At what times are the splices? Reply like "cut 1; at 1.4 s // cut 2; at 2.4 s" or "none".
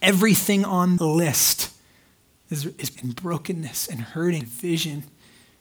cut 1; at 1.0 s // cut 2; at 3.0 s // cut 3; at 4.4 s